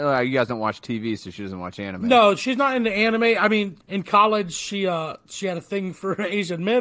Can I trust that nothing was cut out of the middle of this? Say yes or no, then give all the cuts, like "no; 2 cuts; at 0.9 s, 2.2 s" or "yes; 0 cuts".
no; 1 cut; at 3.8 s